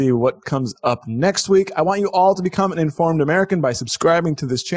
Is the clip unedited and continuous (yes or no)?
yes